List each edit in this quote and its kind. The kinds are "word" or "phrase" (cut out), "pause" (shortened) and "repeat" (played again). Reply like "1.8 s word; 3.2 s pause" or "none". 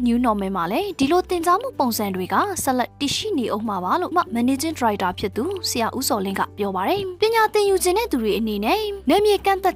4.1 s word